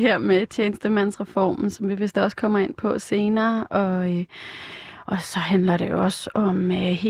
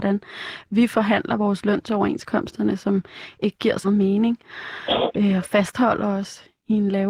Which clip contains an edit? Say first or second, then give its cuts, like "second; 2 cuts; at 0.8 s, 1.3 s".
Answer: second; 1 cut; at 3.8 s